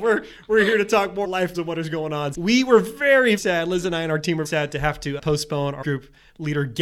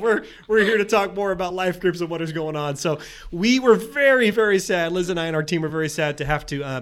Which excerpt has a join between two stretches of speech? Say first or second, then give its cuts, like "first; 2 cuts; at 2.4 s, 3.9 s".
first; 7 cuts; at 1.2 s, 1.5 s, 2.3 s, 3.4 s, 4.5 s, 5.2 s, 5.8 s